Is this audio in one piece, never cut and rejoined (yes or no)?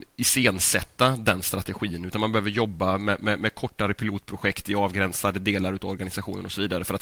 yes